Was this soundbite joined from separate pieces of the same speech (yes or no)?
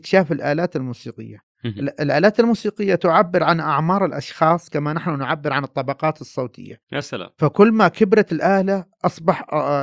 no